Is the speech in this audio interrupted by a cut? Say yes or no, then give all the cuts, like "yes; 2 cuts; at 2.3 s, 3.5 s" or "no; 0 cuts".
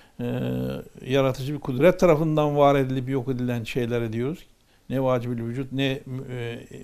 no; 0 cuts